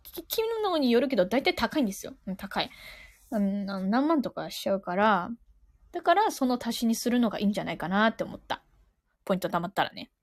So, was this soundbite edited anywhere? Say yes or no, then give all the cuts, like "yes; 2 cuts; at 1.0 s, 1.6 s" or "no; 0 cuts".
no; 0 cuts